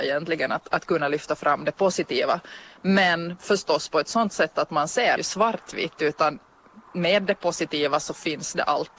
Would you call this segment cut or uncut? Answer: cut